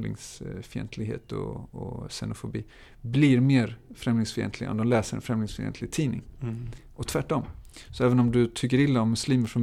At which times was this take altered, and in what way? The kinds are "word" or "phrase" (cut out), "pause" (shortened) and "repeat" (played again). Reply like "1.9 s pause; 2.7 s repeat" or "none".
none